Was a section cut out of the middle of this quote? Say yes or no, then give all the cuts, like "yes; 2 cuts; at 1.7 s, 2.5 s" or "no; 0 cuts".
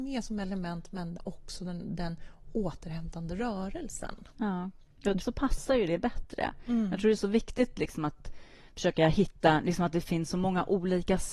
yes; 1 cut; at 5.2 s